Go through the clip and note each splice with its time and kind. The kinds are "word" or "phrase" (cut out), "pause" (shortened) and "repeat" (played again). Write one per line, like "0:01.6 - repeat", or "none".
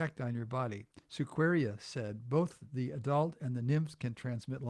0:01.0 - pause